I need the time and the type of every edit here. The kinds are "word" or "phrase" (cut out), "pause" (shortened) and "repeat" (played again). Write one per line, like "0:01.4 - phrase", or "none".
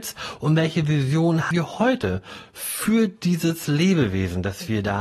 0:01.5 - word